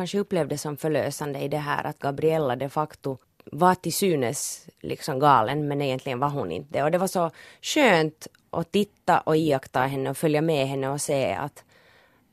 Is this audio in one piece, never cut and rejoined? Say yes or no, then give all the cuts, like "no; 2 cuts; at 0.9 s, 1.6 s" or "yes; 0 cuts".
yes; 0 cuts